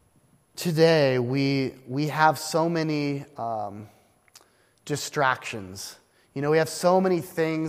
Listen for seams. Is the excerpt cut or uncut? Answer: uncut